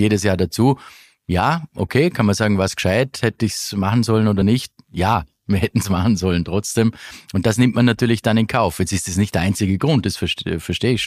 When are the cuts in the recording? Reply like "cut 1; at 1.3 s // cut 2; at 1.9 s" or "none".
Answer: none